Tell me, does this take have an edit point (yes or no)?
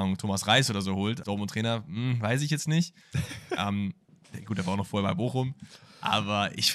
yes